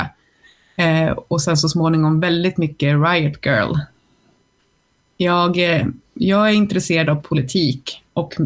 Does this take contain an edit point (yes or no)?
no